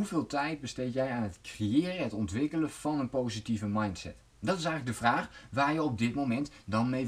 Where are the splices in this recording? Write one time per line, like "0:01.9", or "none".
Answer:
0:04.3